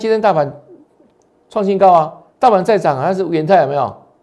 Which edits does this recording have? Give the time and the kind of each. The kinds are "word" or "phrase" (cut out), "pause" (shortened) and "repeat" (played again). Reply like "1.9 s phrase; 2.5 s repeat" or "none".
2.3 s pause